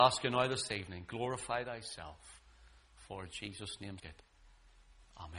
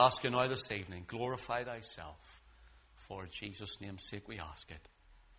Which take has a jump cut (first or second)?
first